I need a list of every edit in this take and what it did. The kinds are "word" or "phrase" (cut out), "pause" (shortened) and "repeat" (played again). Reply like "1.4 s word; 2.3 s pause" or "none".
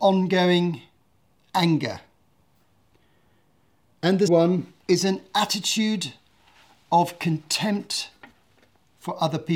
4.3 s word; 4.8 s pause